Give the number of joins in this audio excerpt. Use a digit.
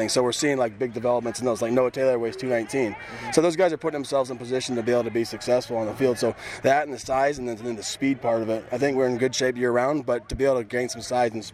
0